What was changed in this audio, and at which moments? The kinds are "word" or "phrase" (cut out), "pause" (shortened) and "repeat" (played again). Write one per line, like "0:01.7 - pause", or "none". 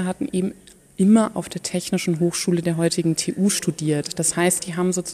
0:01.3 - word